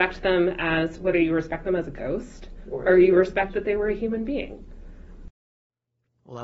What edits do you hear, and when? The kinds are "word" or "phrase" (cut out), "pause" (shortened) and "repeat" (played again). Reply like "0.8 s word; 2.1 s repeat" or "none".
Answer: none

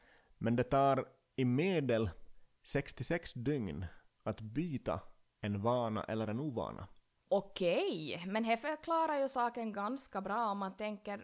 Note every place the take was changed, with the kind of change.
none

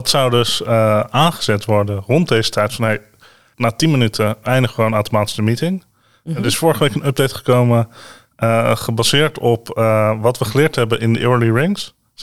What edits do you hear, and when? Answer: 3.5 s word

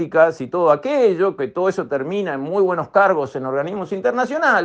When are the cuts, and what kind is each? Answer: none

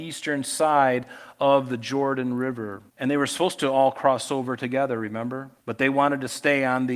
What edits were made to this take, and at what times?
2.9 s pause; 5.6 s pause

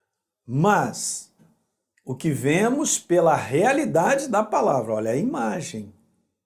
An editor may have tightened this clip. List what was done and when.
none

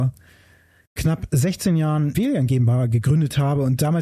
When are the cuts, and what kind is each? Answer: 2.1 s word

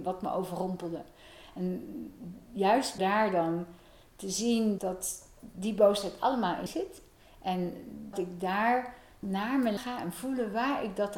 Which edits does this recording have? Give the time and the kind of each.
3.0 s word; 4.8 s word; 6.7 s word; 8.1 s word; 9.2 s word; 9.8 s word

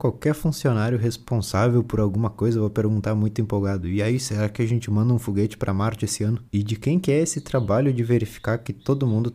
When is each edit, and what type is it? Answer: 6.5 s pause

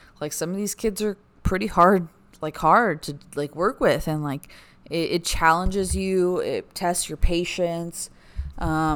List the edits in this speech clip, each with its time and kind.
none

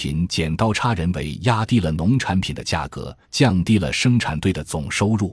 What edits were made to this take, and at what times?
3.2 s pause

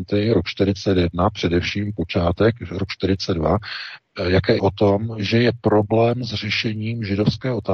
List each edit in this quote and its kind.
4.6 s word

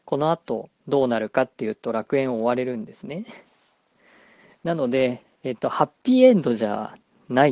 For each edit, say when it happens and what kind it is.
5.3 s pause

